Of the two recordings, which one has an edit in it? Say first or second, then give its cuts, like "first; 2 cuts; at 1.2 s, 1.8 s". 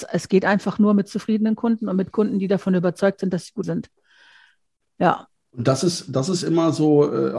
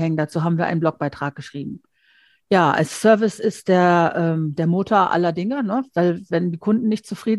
first; 2 cuts; at 3.6 s, 5.4 s